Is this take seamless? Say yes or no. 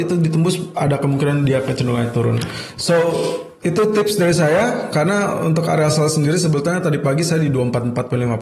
yes